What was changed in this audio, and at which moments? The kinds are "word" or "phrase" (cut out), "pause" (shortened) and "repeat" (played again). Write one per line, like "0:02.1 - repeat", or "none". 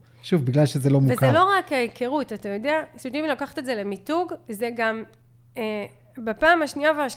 none